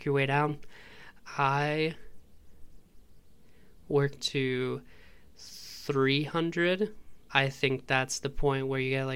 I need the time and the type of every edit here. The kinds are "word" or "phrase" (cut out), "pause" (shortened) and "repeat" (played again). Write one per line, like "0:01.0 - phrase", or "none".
0:04.2 - phrase
0:07.2 - pause